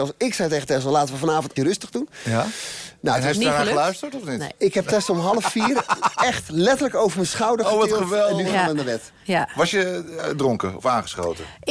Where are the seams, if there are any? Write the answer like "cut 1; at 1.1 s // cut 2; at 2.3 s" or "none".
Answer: cut 1; at 1.6 s